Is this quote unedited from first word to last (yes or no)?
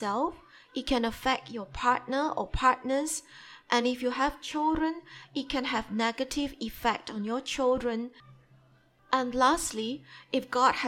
yes